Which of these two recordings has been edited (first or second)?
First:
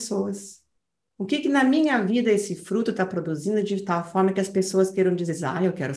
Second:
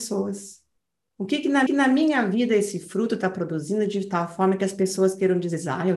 second